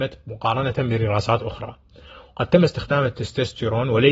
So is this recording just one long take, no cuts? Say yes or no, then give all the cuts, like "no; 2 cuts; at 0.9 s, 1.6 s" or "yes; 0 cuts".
yes; 0 cuts